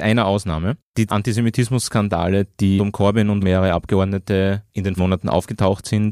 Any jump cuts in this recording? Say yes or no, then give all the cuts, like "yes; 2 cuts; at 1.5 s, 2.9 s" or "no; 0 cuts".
yes; 4 cuts; at 1.1 s, 2.8 s, 3.4 s, 5.0 s